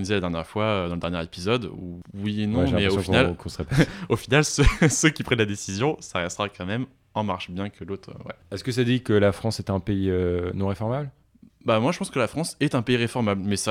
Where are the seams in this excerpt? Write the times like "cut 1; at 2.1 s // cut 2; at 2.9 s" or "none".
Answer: none